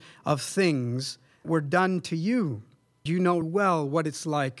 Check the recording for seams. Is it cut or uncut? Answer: cut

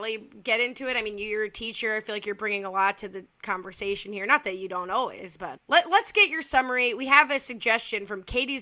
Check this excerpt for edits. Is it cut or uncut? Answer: cut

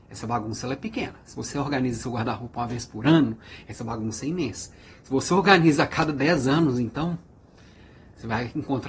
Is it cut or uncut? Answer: uncut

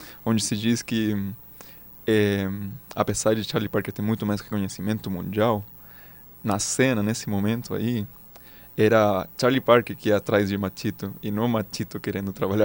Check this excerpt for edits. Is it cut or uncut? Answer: uncut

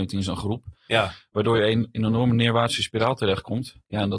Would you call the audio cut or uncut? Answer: uncut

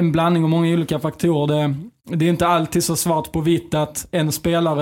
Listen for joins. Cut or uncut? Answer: uncut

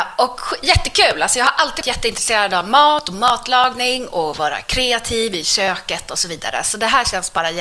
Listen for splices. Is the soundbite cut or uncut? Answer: cut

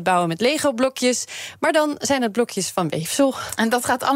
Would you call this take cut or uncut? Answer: uncut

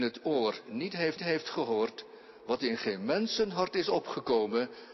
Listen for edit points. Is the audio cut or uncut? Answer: cut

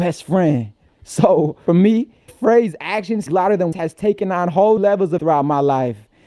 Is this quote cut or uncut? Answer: cut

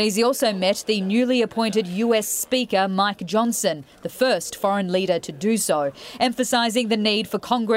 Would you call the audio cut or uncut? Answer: uncut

